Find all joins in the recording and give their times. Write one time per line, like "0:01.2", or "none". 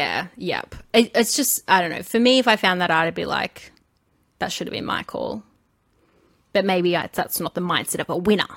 none